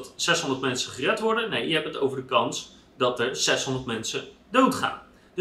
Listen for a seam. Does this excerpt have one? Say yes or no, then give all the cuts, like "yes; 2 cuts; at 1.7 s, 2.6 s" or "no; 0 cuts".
no; 0 cuts